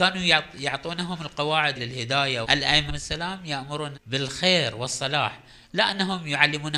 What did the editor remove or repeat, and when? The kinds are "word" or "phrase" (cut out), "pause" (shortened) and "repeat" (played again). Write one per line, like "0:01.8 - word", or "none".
0:01.7 - word
0:02.4 - word
0:02.9 - word
0:03.9 - word